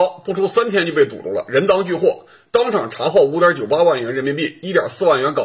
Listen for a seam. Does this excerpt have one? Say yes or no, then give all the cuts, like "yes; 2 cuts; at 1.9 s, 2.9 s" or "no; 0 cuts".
no; 0 cuts